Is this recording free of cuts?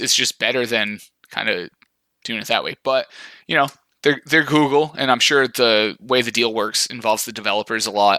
yes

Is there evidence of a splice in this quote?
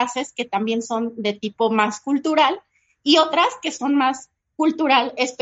no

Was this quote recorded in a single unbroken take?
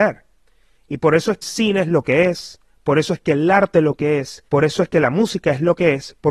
no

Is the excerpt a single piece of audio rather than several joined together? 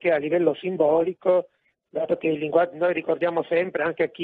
yes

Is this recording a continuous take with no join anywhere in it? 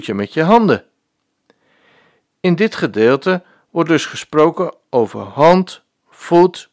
yes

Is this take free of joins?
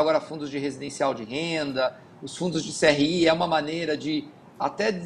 yes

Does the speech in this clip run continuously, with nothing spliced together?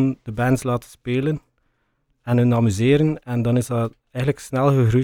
yes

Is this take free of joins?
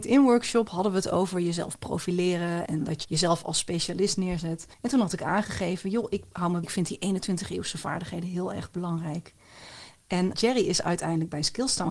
no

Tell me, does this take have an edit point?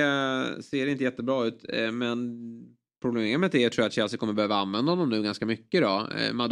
no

